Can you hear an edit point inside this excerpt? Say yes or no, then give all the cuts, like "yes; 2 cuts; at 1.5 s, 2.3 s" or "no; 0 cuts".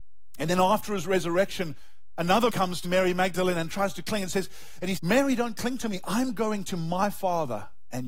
yes; 3 cuts; at 2.5 s, 2.8 s, 5.0 s